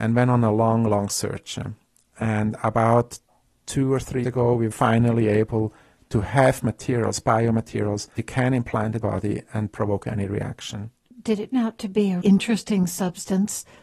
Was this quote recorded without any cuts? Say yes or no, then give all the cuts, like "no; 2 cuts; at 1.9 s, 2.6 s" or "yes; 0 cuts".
no; 7 cuts; at 4.2 s, 4.7 s, 8.2 s, 9.0 s, 9.7 s, 11.5 s, 12.2 s